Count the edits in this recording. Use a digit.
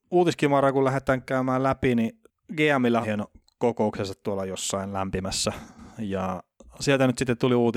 1